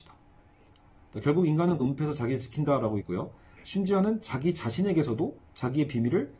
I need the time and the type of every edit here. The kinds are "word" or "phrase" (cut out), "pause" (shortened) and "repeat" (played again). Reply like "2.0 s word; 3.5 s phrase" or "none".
1.8 s word; 3.0 s word